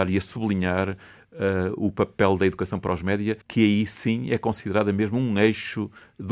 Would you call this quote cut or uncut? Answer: cut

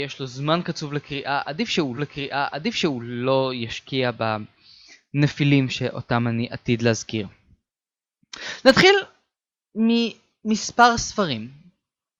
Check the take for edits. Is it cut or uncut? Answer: cut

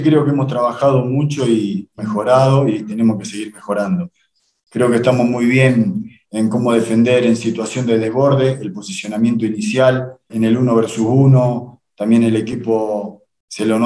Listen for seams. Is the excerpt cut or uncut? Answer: cut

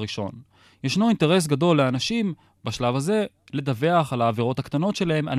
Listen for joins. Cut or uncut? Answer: uncut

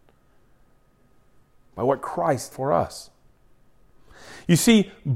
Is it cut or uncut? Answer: cut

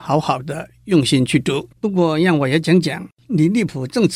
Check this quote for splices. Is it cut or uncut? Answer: cut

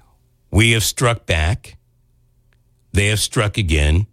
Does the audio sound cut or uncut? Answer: uncut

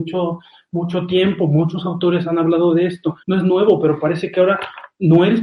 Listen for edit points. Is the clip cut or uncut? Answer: cut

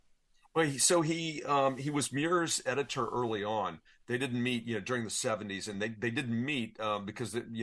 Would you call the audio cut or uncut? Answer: uncut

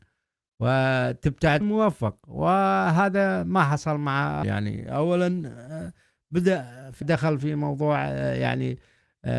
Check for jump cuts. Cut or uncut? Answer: cut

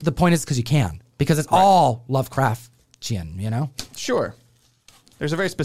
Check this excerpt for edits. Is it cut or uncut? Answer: uncut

